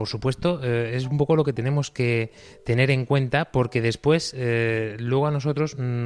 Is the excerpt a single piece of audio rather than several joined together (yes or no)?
yes